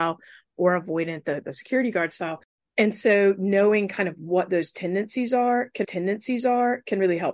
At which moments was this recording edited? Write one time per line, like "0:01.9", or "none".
0:05.8

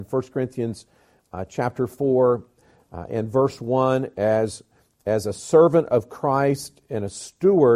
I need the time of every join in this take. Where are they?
none

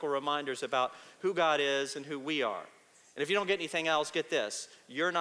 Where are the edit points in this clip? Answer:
none

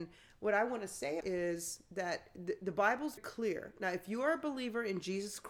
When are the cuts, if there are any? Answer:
0:01.2
0:03.2

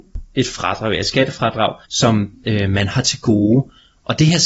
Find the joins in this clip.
0:01.8

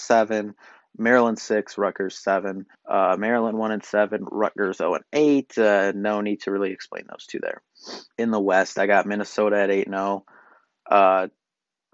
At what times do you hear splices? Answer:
0:02.7
0:08.1

